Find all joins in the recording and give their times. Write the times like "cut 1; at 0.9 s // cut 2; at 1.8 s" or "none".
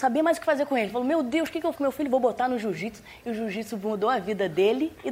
cut 1; at 1.8 s